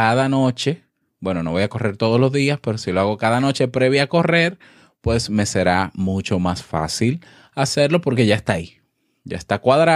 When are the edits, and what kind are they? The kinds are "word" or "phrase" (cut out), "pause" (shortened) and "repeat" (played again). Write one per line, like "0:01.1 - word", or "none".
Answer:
none

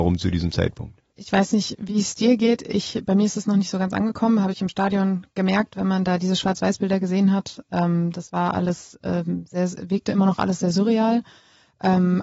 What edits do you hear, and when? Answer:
0:01.1 - pause

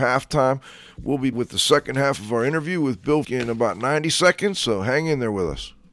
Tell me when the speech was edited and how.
0:01.3 - word
0:03.2 - word

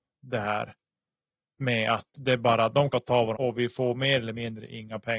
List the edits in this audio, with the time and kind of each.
0:02.9 - phrase
0:03.3 - phrase

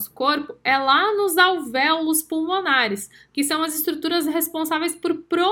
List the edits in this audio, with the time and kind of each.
none

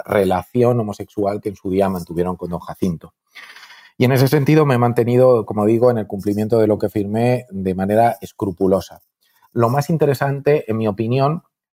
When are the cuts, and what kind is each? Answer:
none

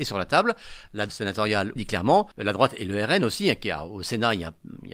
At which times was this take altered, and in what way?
0:01.1 - word
0:01.8 - phrase
0:02.3 - pause

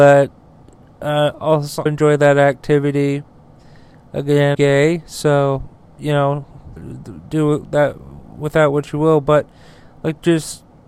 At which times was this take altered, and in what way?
0:01.9 - word
0:04.5 - word
0:06.8 - word

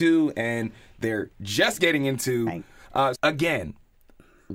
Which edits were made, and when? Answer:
0:03.1 - word

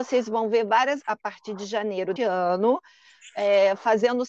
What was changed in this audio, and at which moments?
0:01.0 - word
0:02.2 - word

